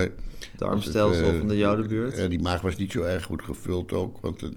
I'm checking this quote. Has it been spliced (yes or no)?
no